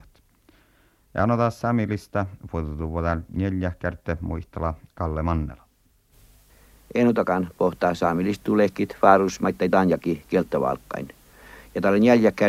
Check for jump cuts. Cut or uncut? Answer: uncut